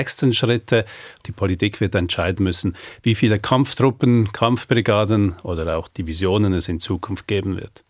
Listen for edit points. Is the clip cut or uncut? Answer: uncut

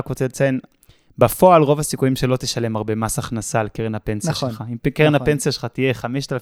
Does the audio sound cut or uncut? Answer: uncut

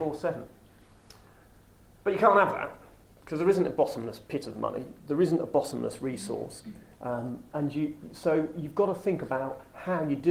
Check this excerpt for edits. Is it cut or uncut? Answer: cut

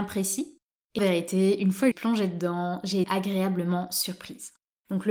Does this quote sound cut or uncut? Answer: cut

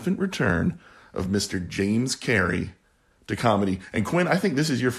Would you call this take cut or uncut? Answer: uncut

